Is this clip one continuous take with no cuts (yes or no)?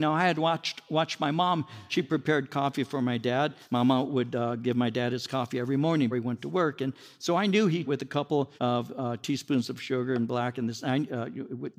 no